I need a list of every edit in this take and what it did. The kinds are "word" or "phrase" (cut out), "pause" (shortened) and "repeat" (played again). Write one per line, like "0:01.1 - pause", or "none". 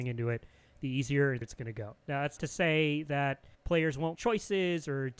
0:01.4 - word
0:02.0 - pause
0:02.4 - word
0:03.5 - pause
0:04.1 - word